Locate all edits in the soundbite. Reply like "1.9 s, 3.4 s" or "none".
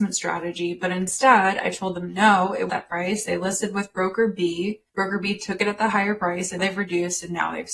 2.7 s, 4.9 s, 6.6 s